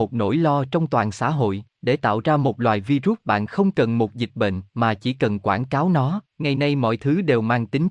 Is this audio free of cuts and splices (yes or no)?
no